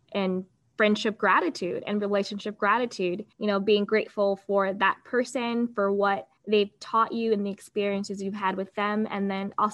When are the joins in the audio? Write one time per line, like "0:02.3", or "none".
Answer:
0:03.3
0:06.4